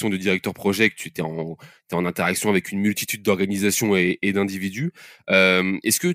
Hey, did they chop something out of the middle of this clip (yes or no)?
no